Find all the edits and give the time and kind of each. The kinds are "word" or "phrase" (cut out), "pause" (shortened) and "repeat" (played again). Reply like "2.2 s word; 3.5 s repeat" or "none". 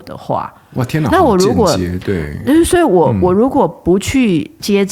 none